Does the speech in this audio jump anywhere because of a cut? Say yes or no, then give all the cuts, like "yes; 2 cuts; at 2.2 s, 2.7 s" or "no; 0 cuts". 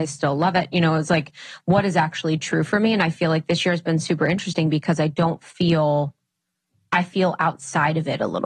no; 0 cuts